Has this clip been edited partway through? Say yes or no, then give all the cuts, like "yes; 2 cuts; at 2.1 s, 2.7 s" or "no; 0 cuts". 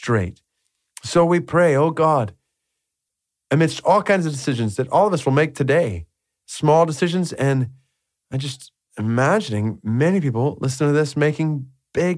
no; 0 cuts